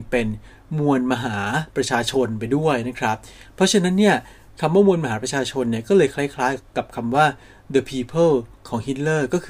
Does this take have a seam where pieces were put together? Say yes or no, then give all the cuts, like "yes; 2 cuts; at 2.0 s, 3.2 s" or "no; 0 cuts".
no; 0 cuts